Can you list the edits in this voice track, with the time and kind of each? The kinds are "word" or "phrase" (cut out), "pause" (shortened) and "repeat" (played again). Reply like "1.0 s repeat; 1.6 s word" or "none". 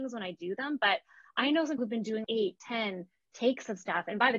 1.8 s word; 2.2 s word